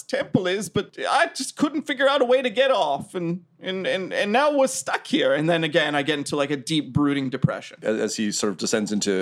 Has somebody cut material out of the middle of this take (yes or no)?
no